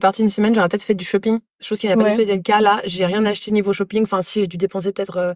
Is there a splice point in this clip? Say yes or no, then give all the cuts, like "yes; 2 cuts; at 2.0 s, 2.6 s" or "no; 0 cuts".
no; 0 cuts